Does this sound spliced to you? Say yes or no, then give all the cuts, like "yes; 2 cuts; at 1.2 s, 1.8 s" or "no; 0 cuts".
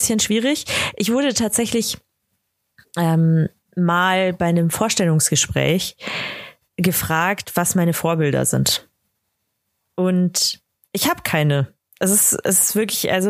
no; 0 cuts